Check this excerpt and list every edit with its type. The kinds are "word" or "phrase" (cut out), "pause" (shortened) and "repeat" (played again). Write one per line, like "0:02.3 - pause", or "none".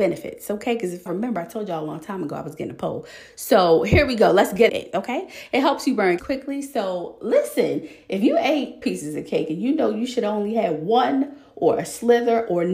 0:01.1 - word
0:04.7 - word
0:06.2 - word
0:08.8 - word